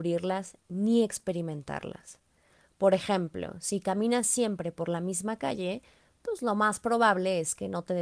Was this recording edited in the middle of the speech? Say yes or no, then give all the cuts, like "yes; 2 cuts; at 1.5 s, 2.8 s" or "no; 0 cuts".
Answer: no; 0 cuts